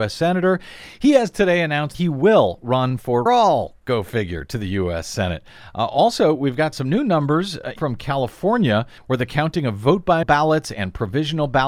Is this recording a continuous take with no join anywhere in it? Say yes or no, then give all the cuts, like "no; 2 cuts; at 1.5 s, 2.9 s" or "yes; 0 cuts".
no; 6 cuts; at 1.9 s, 3.3 s, 6.7 s, 7.8 s, 9.0 s, 10.2 s